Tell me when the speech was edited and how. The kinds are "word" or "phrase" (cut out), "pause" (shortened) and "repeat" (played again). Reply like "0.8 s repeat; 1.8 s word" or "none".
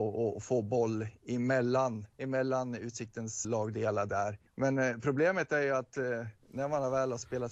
2.1 s pause; 3.4 s word; 4.5 s pause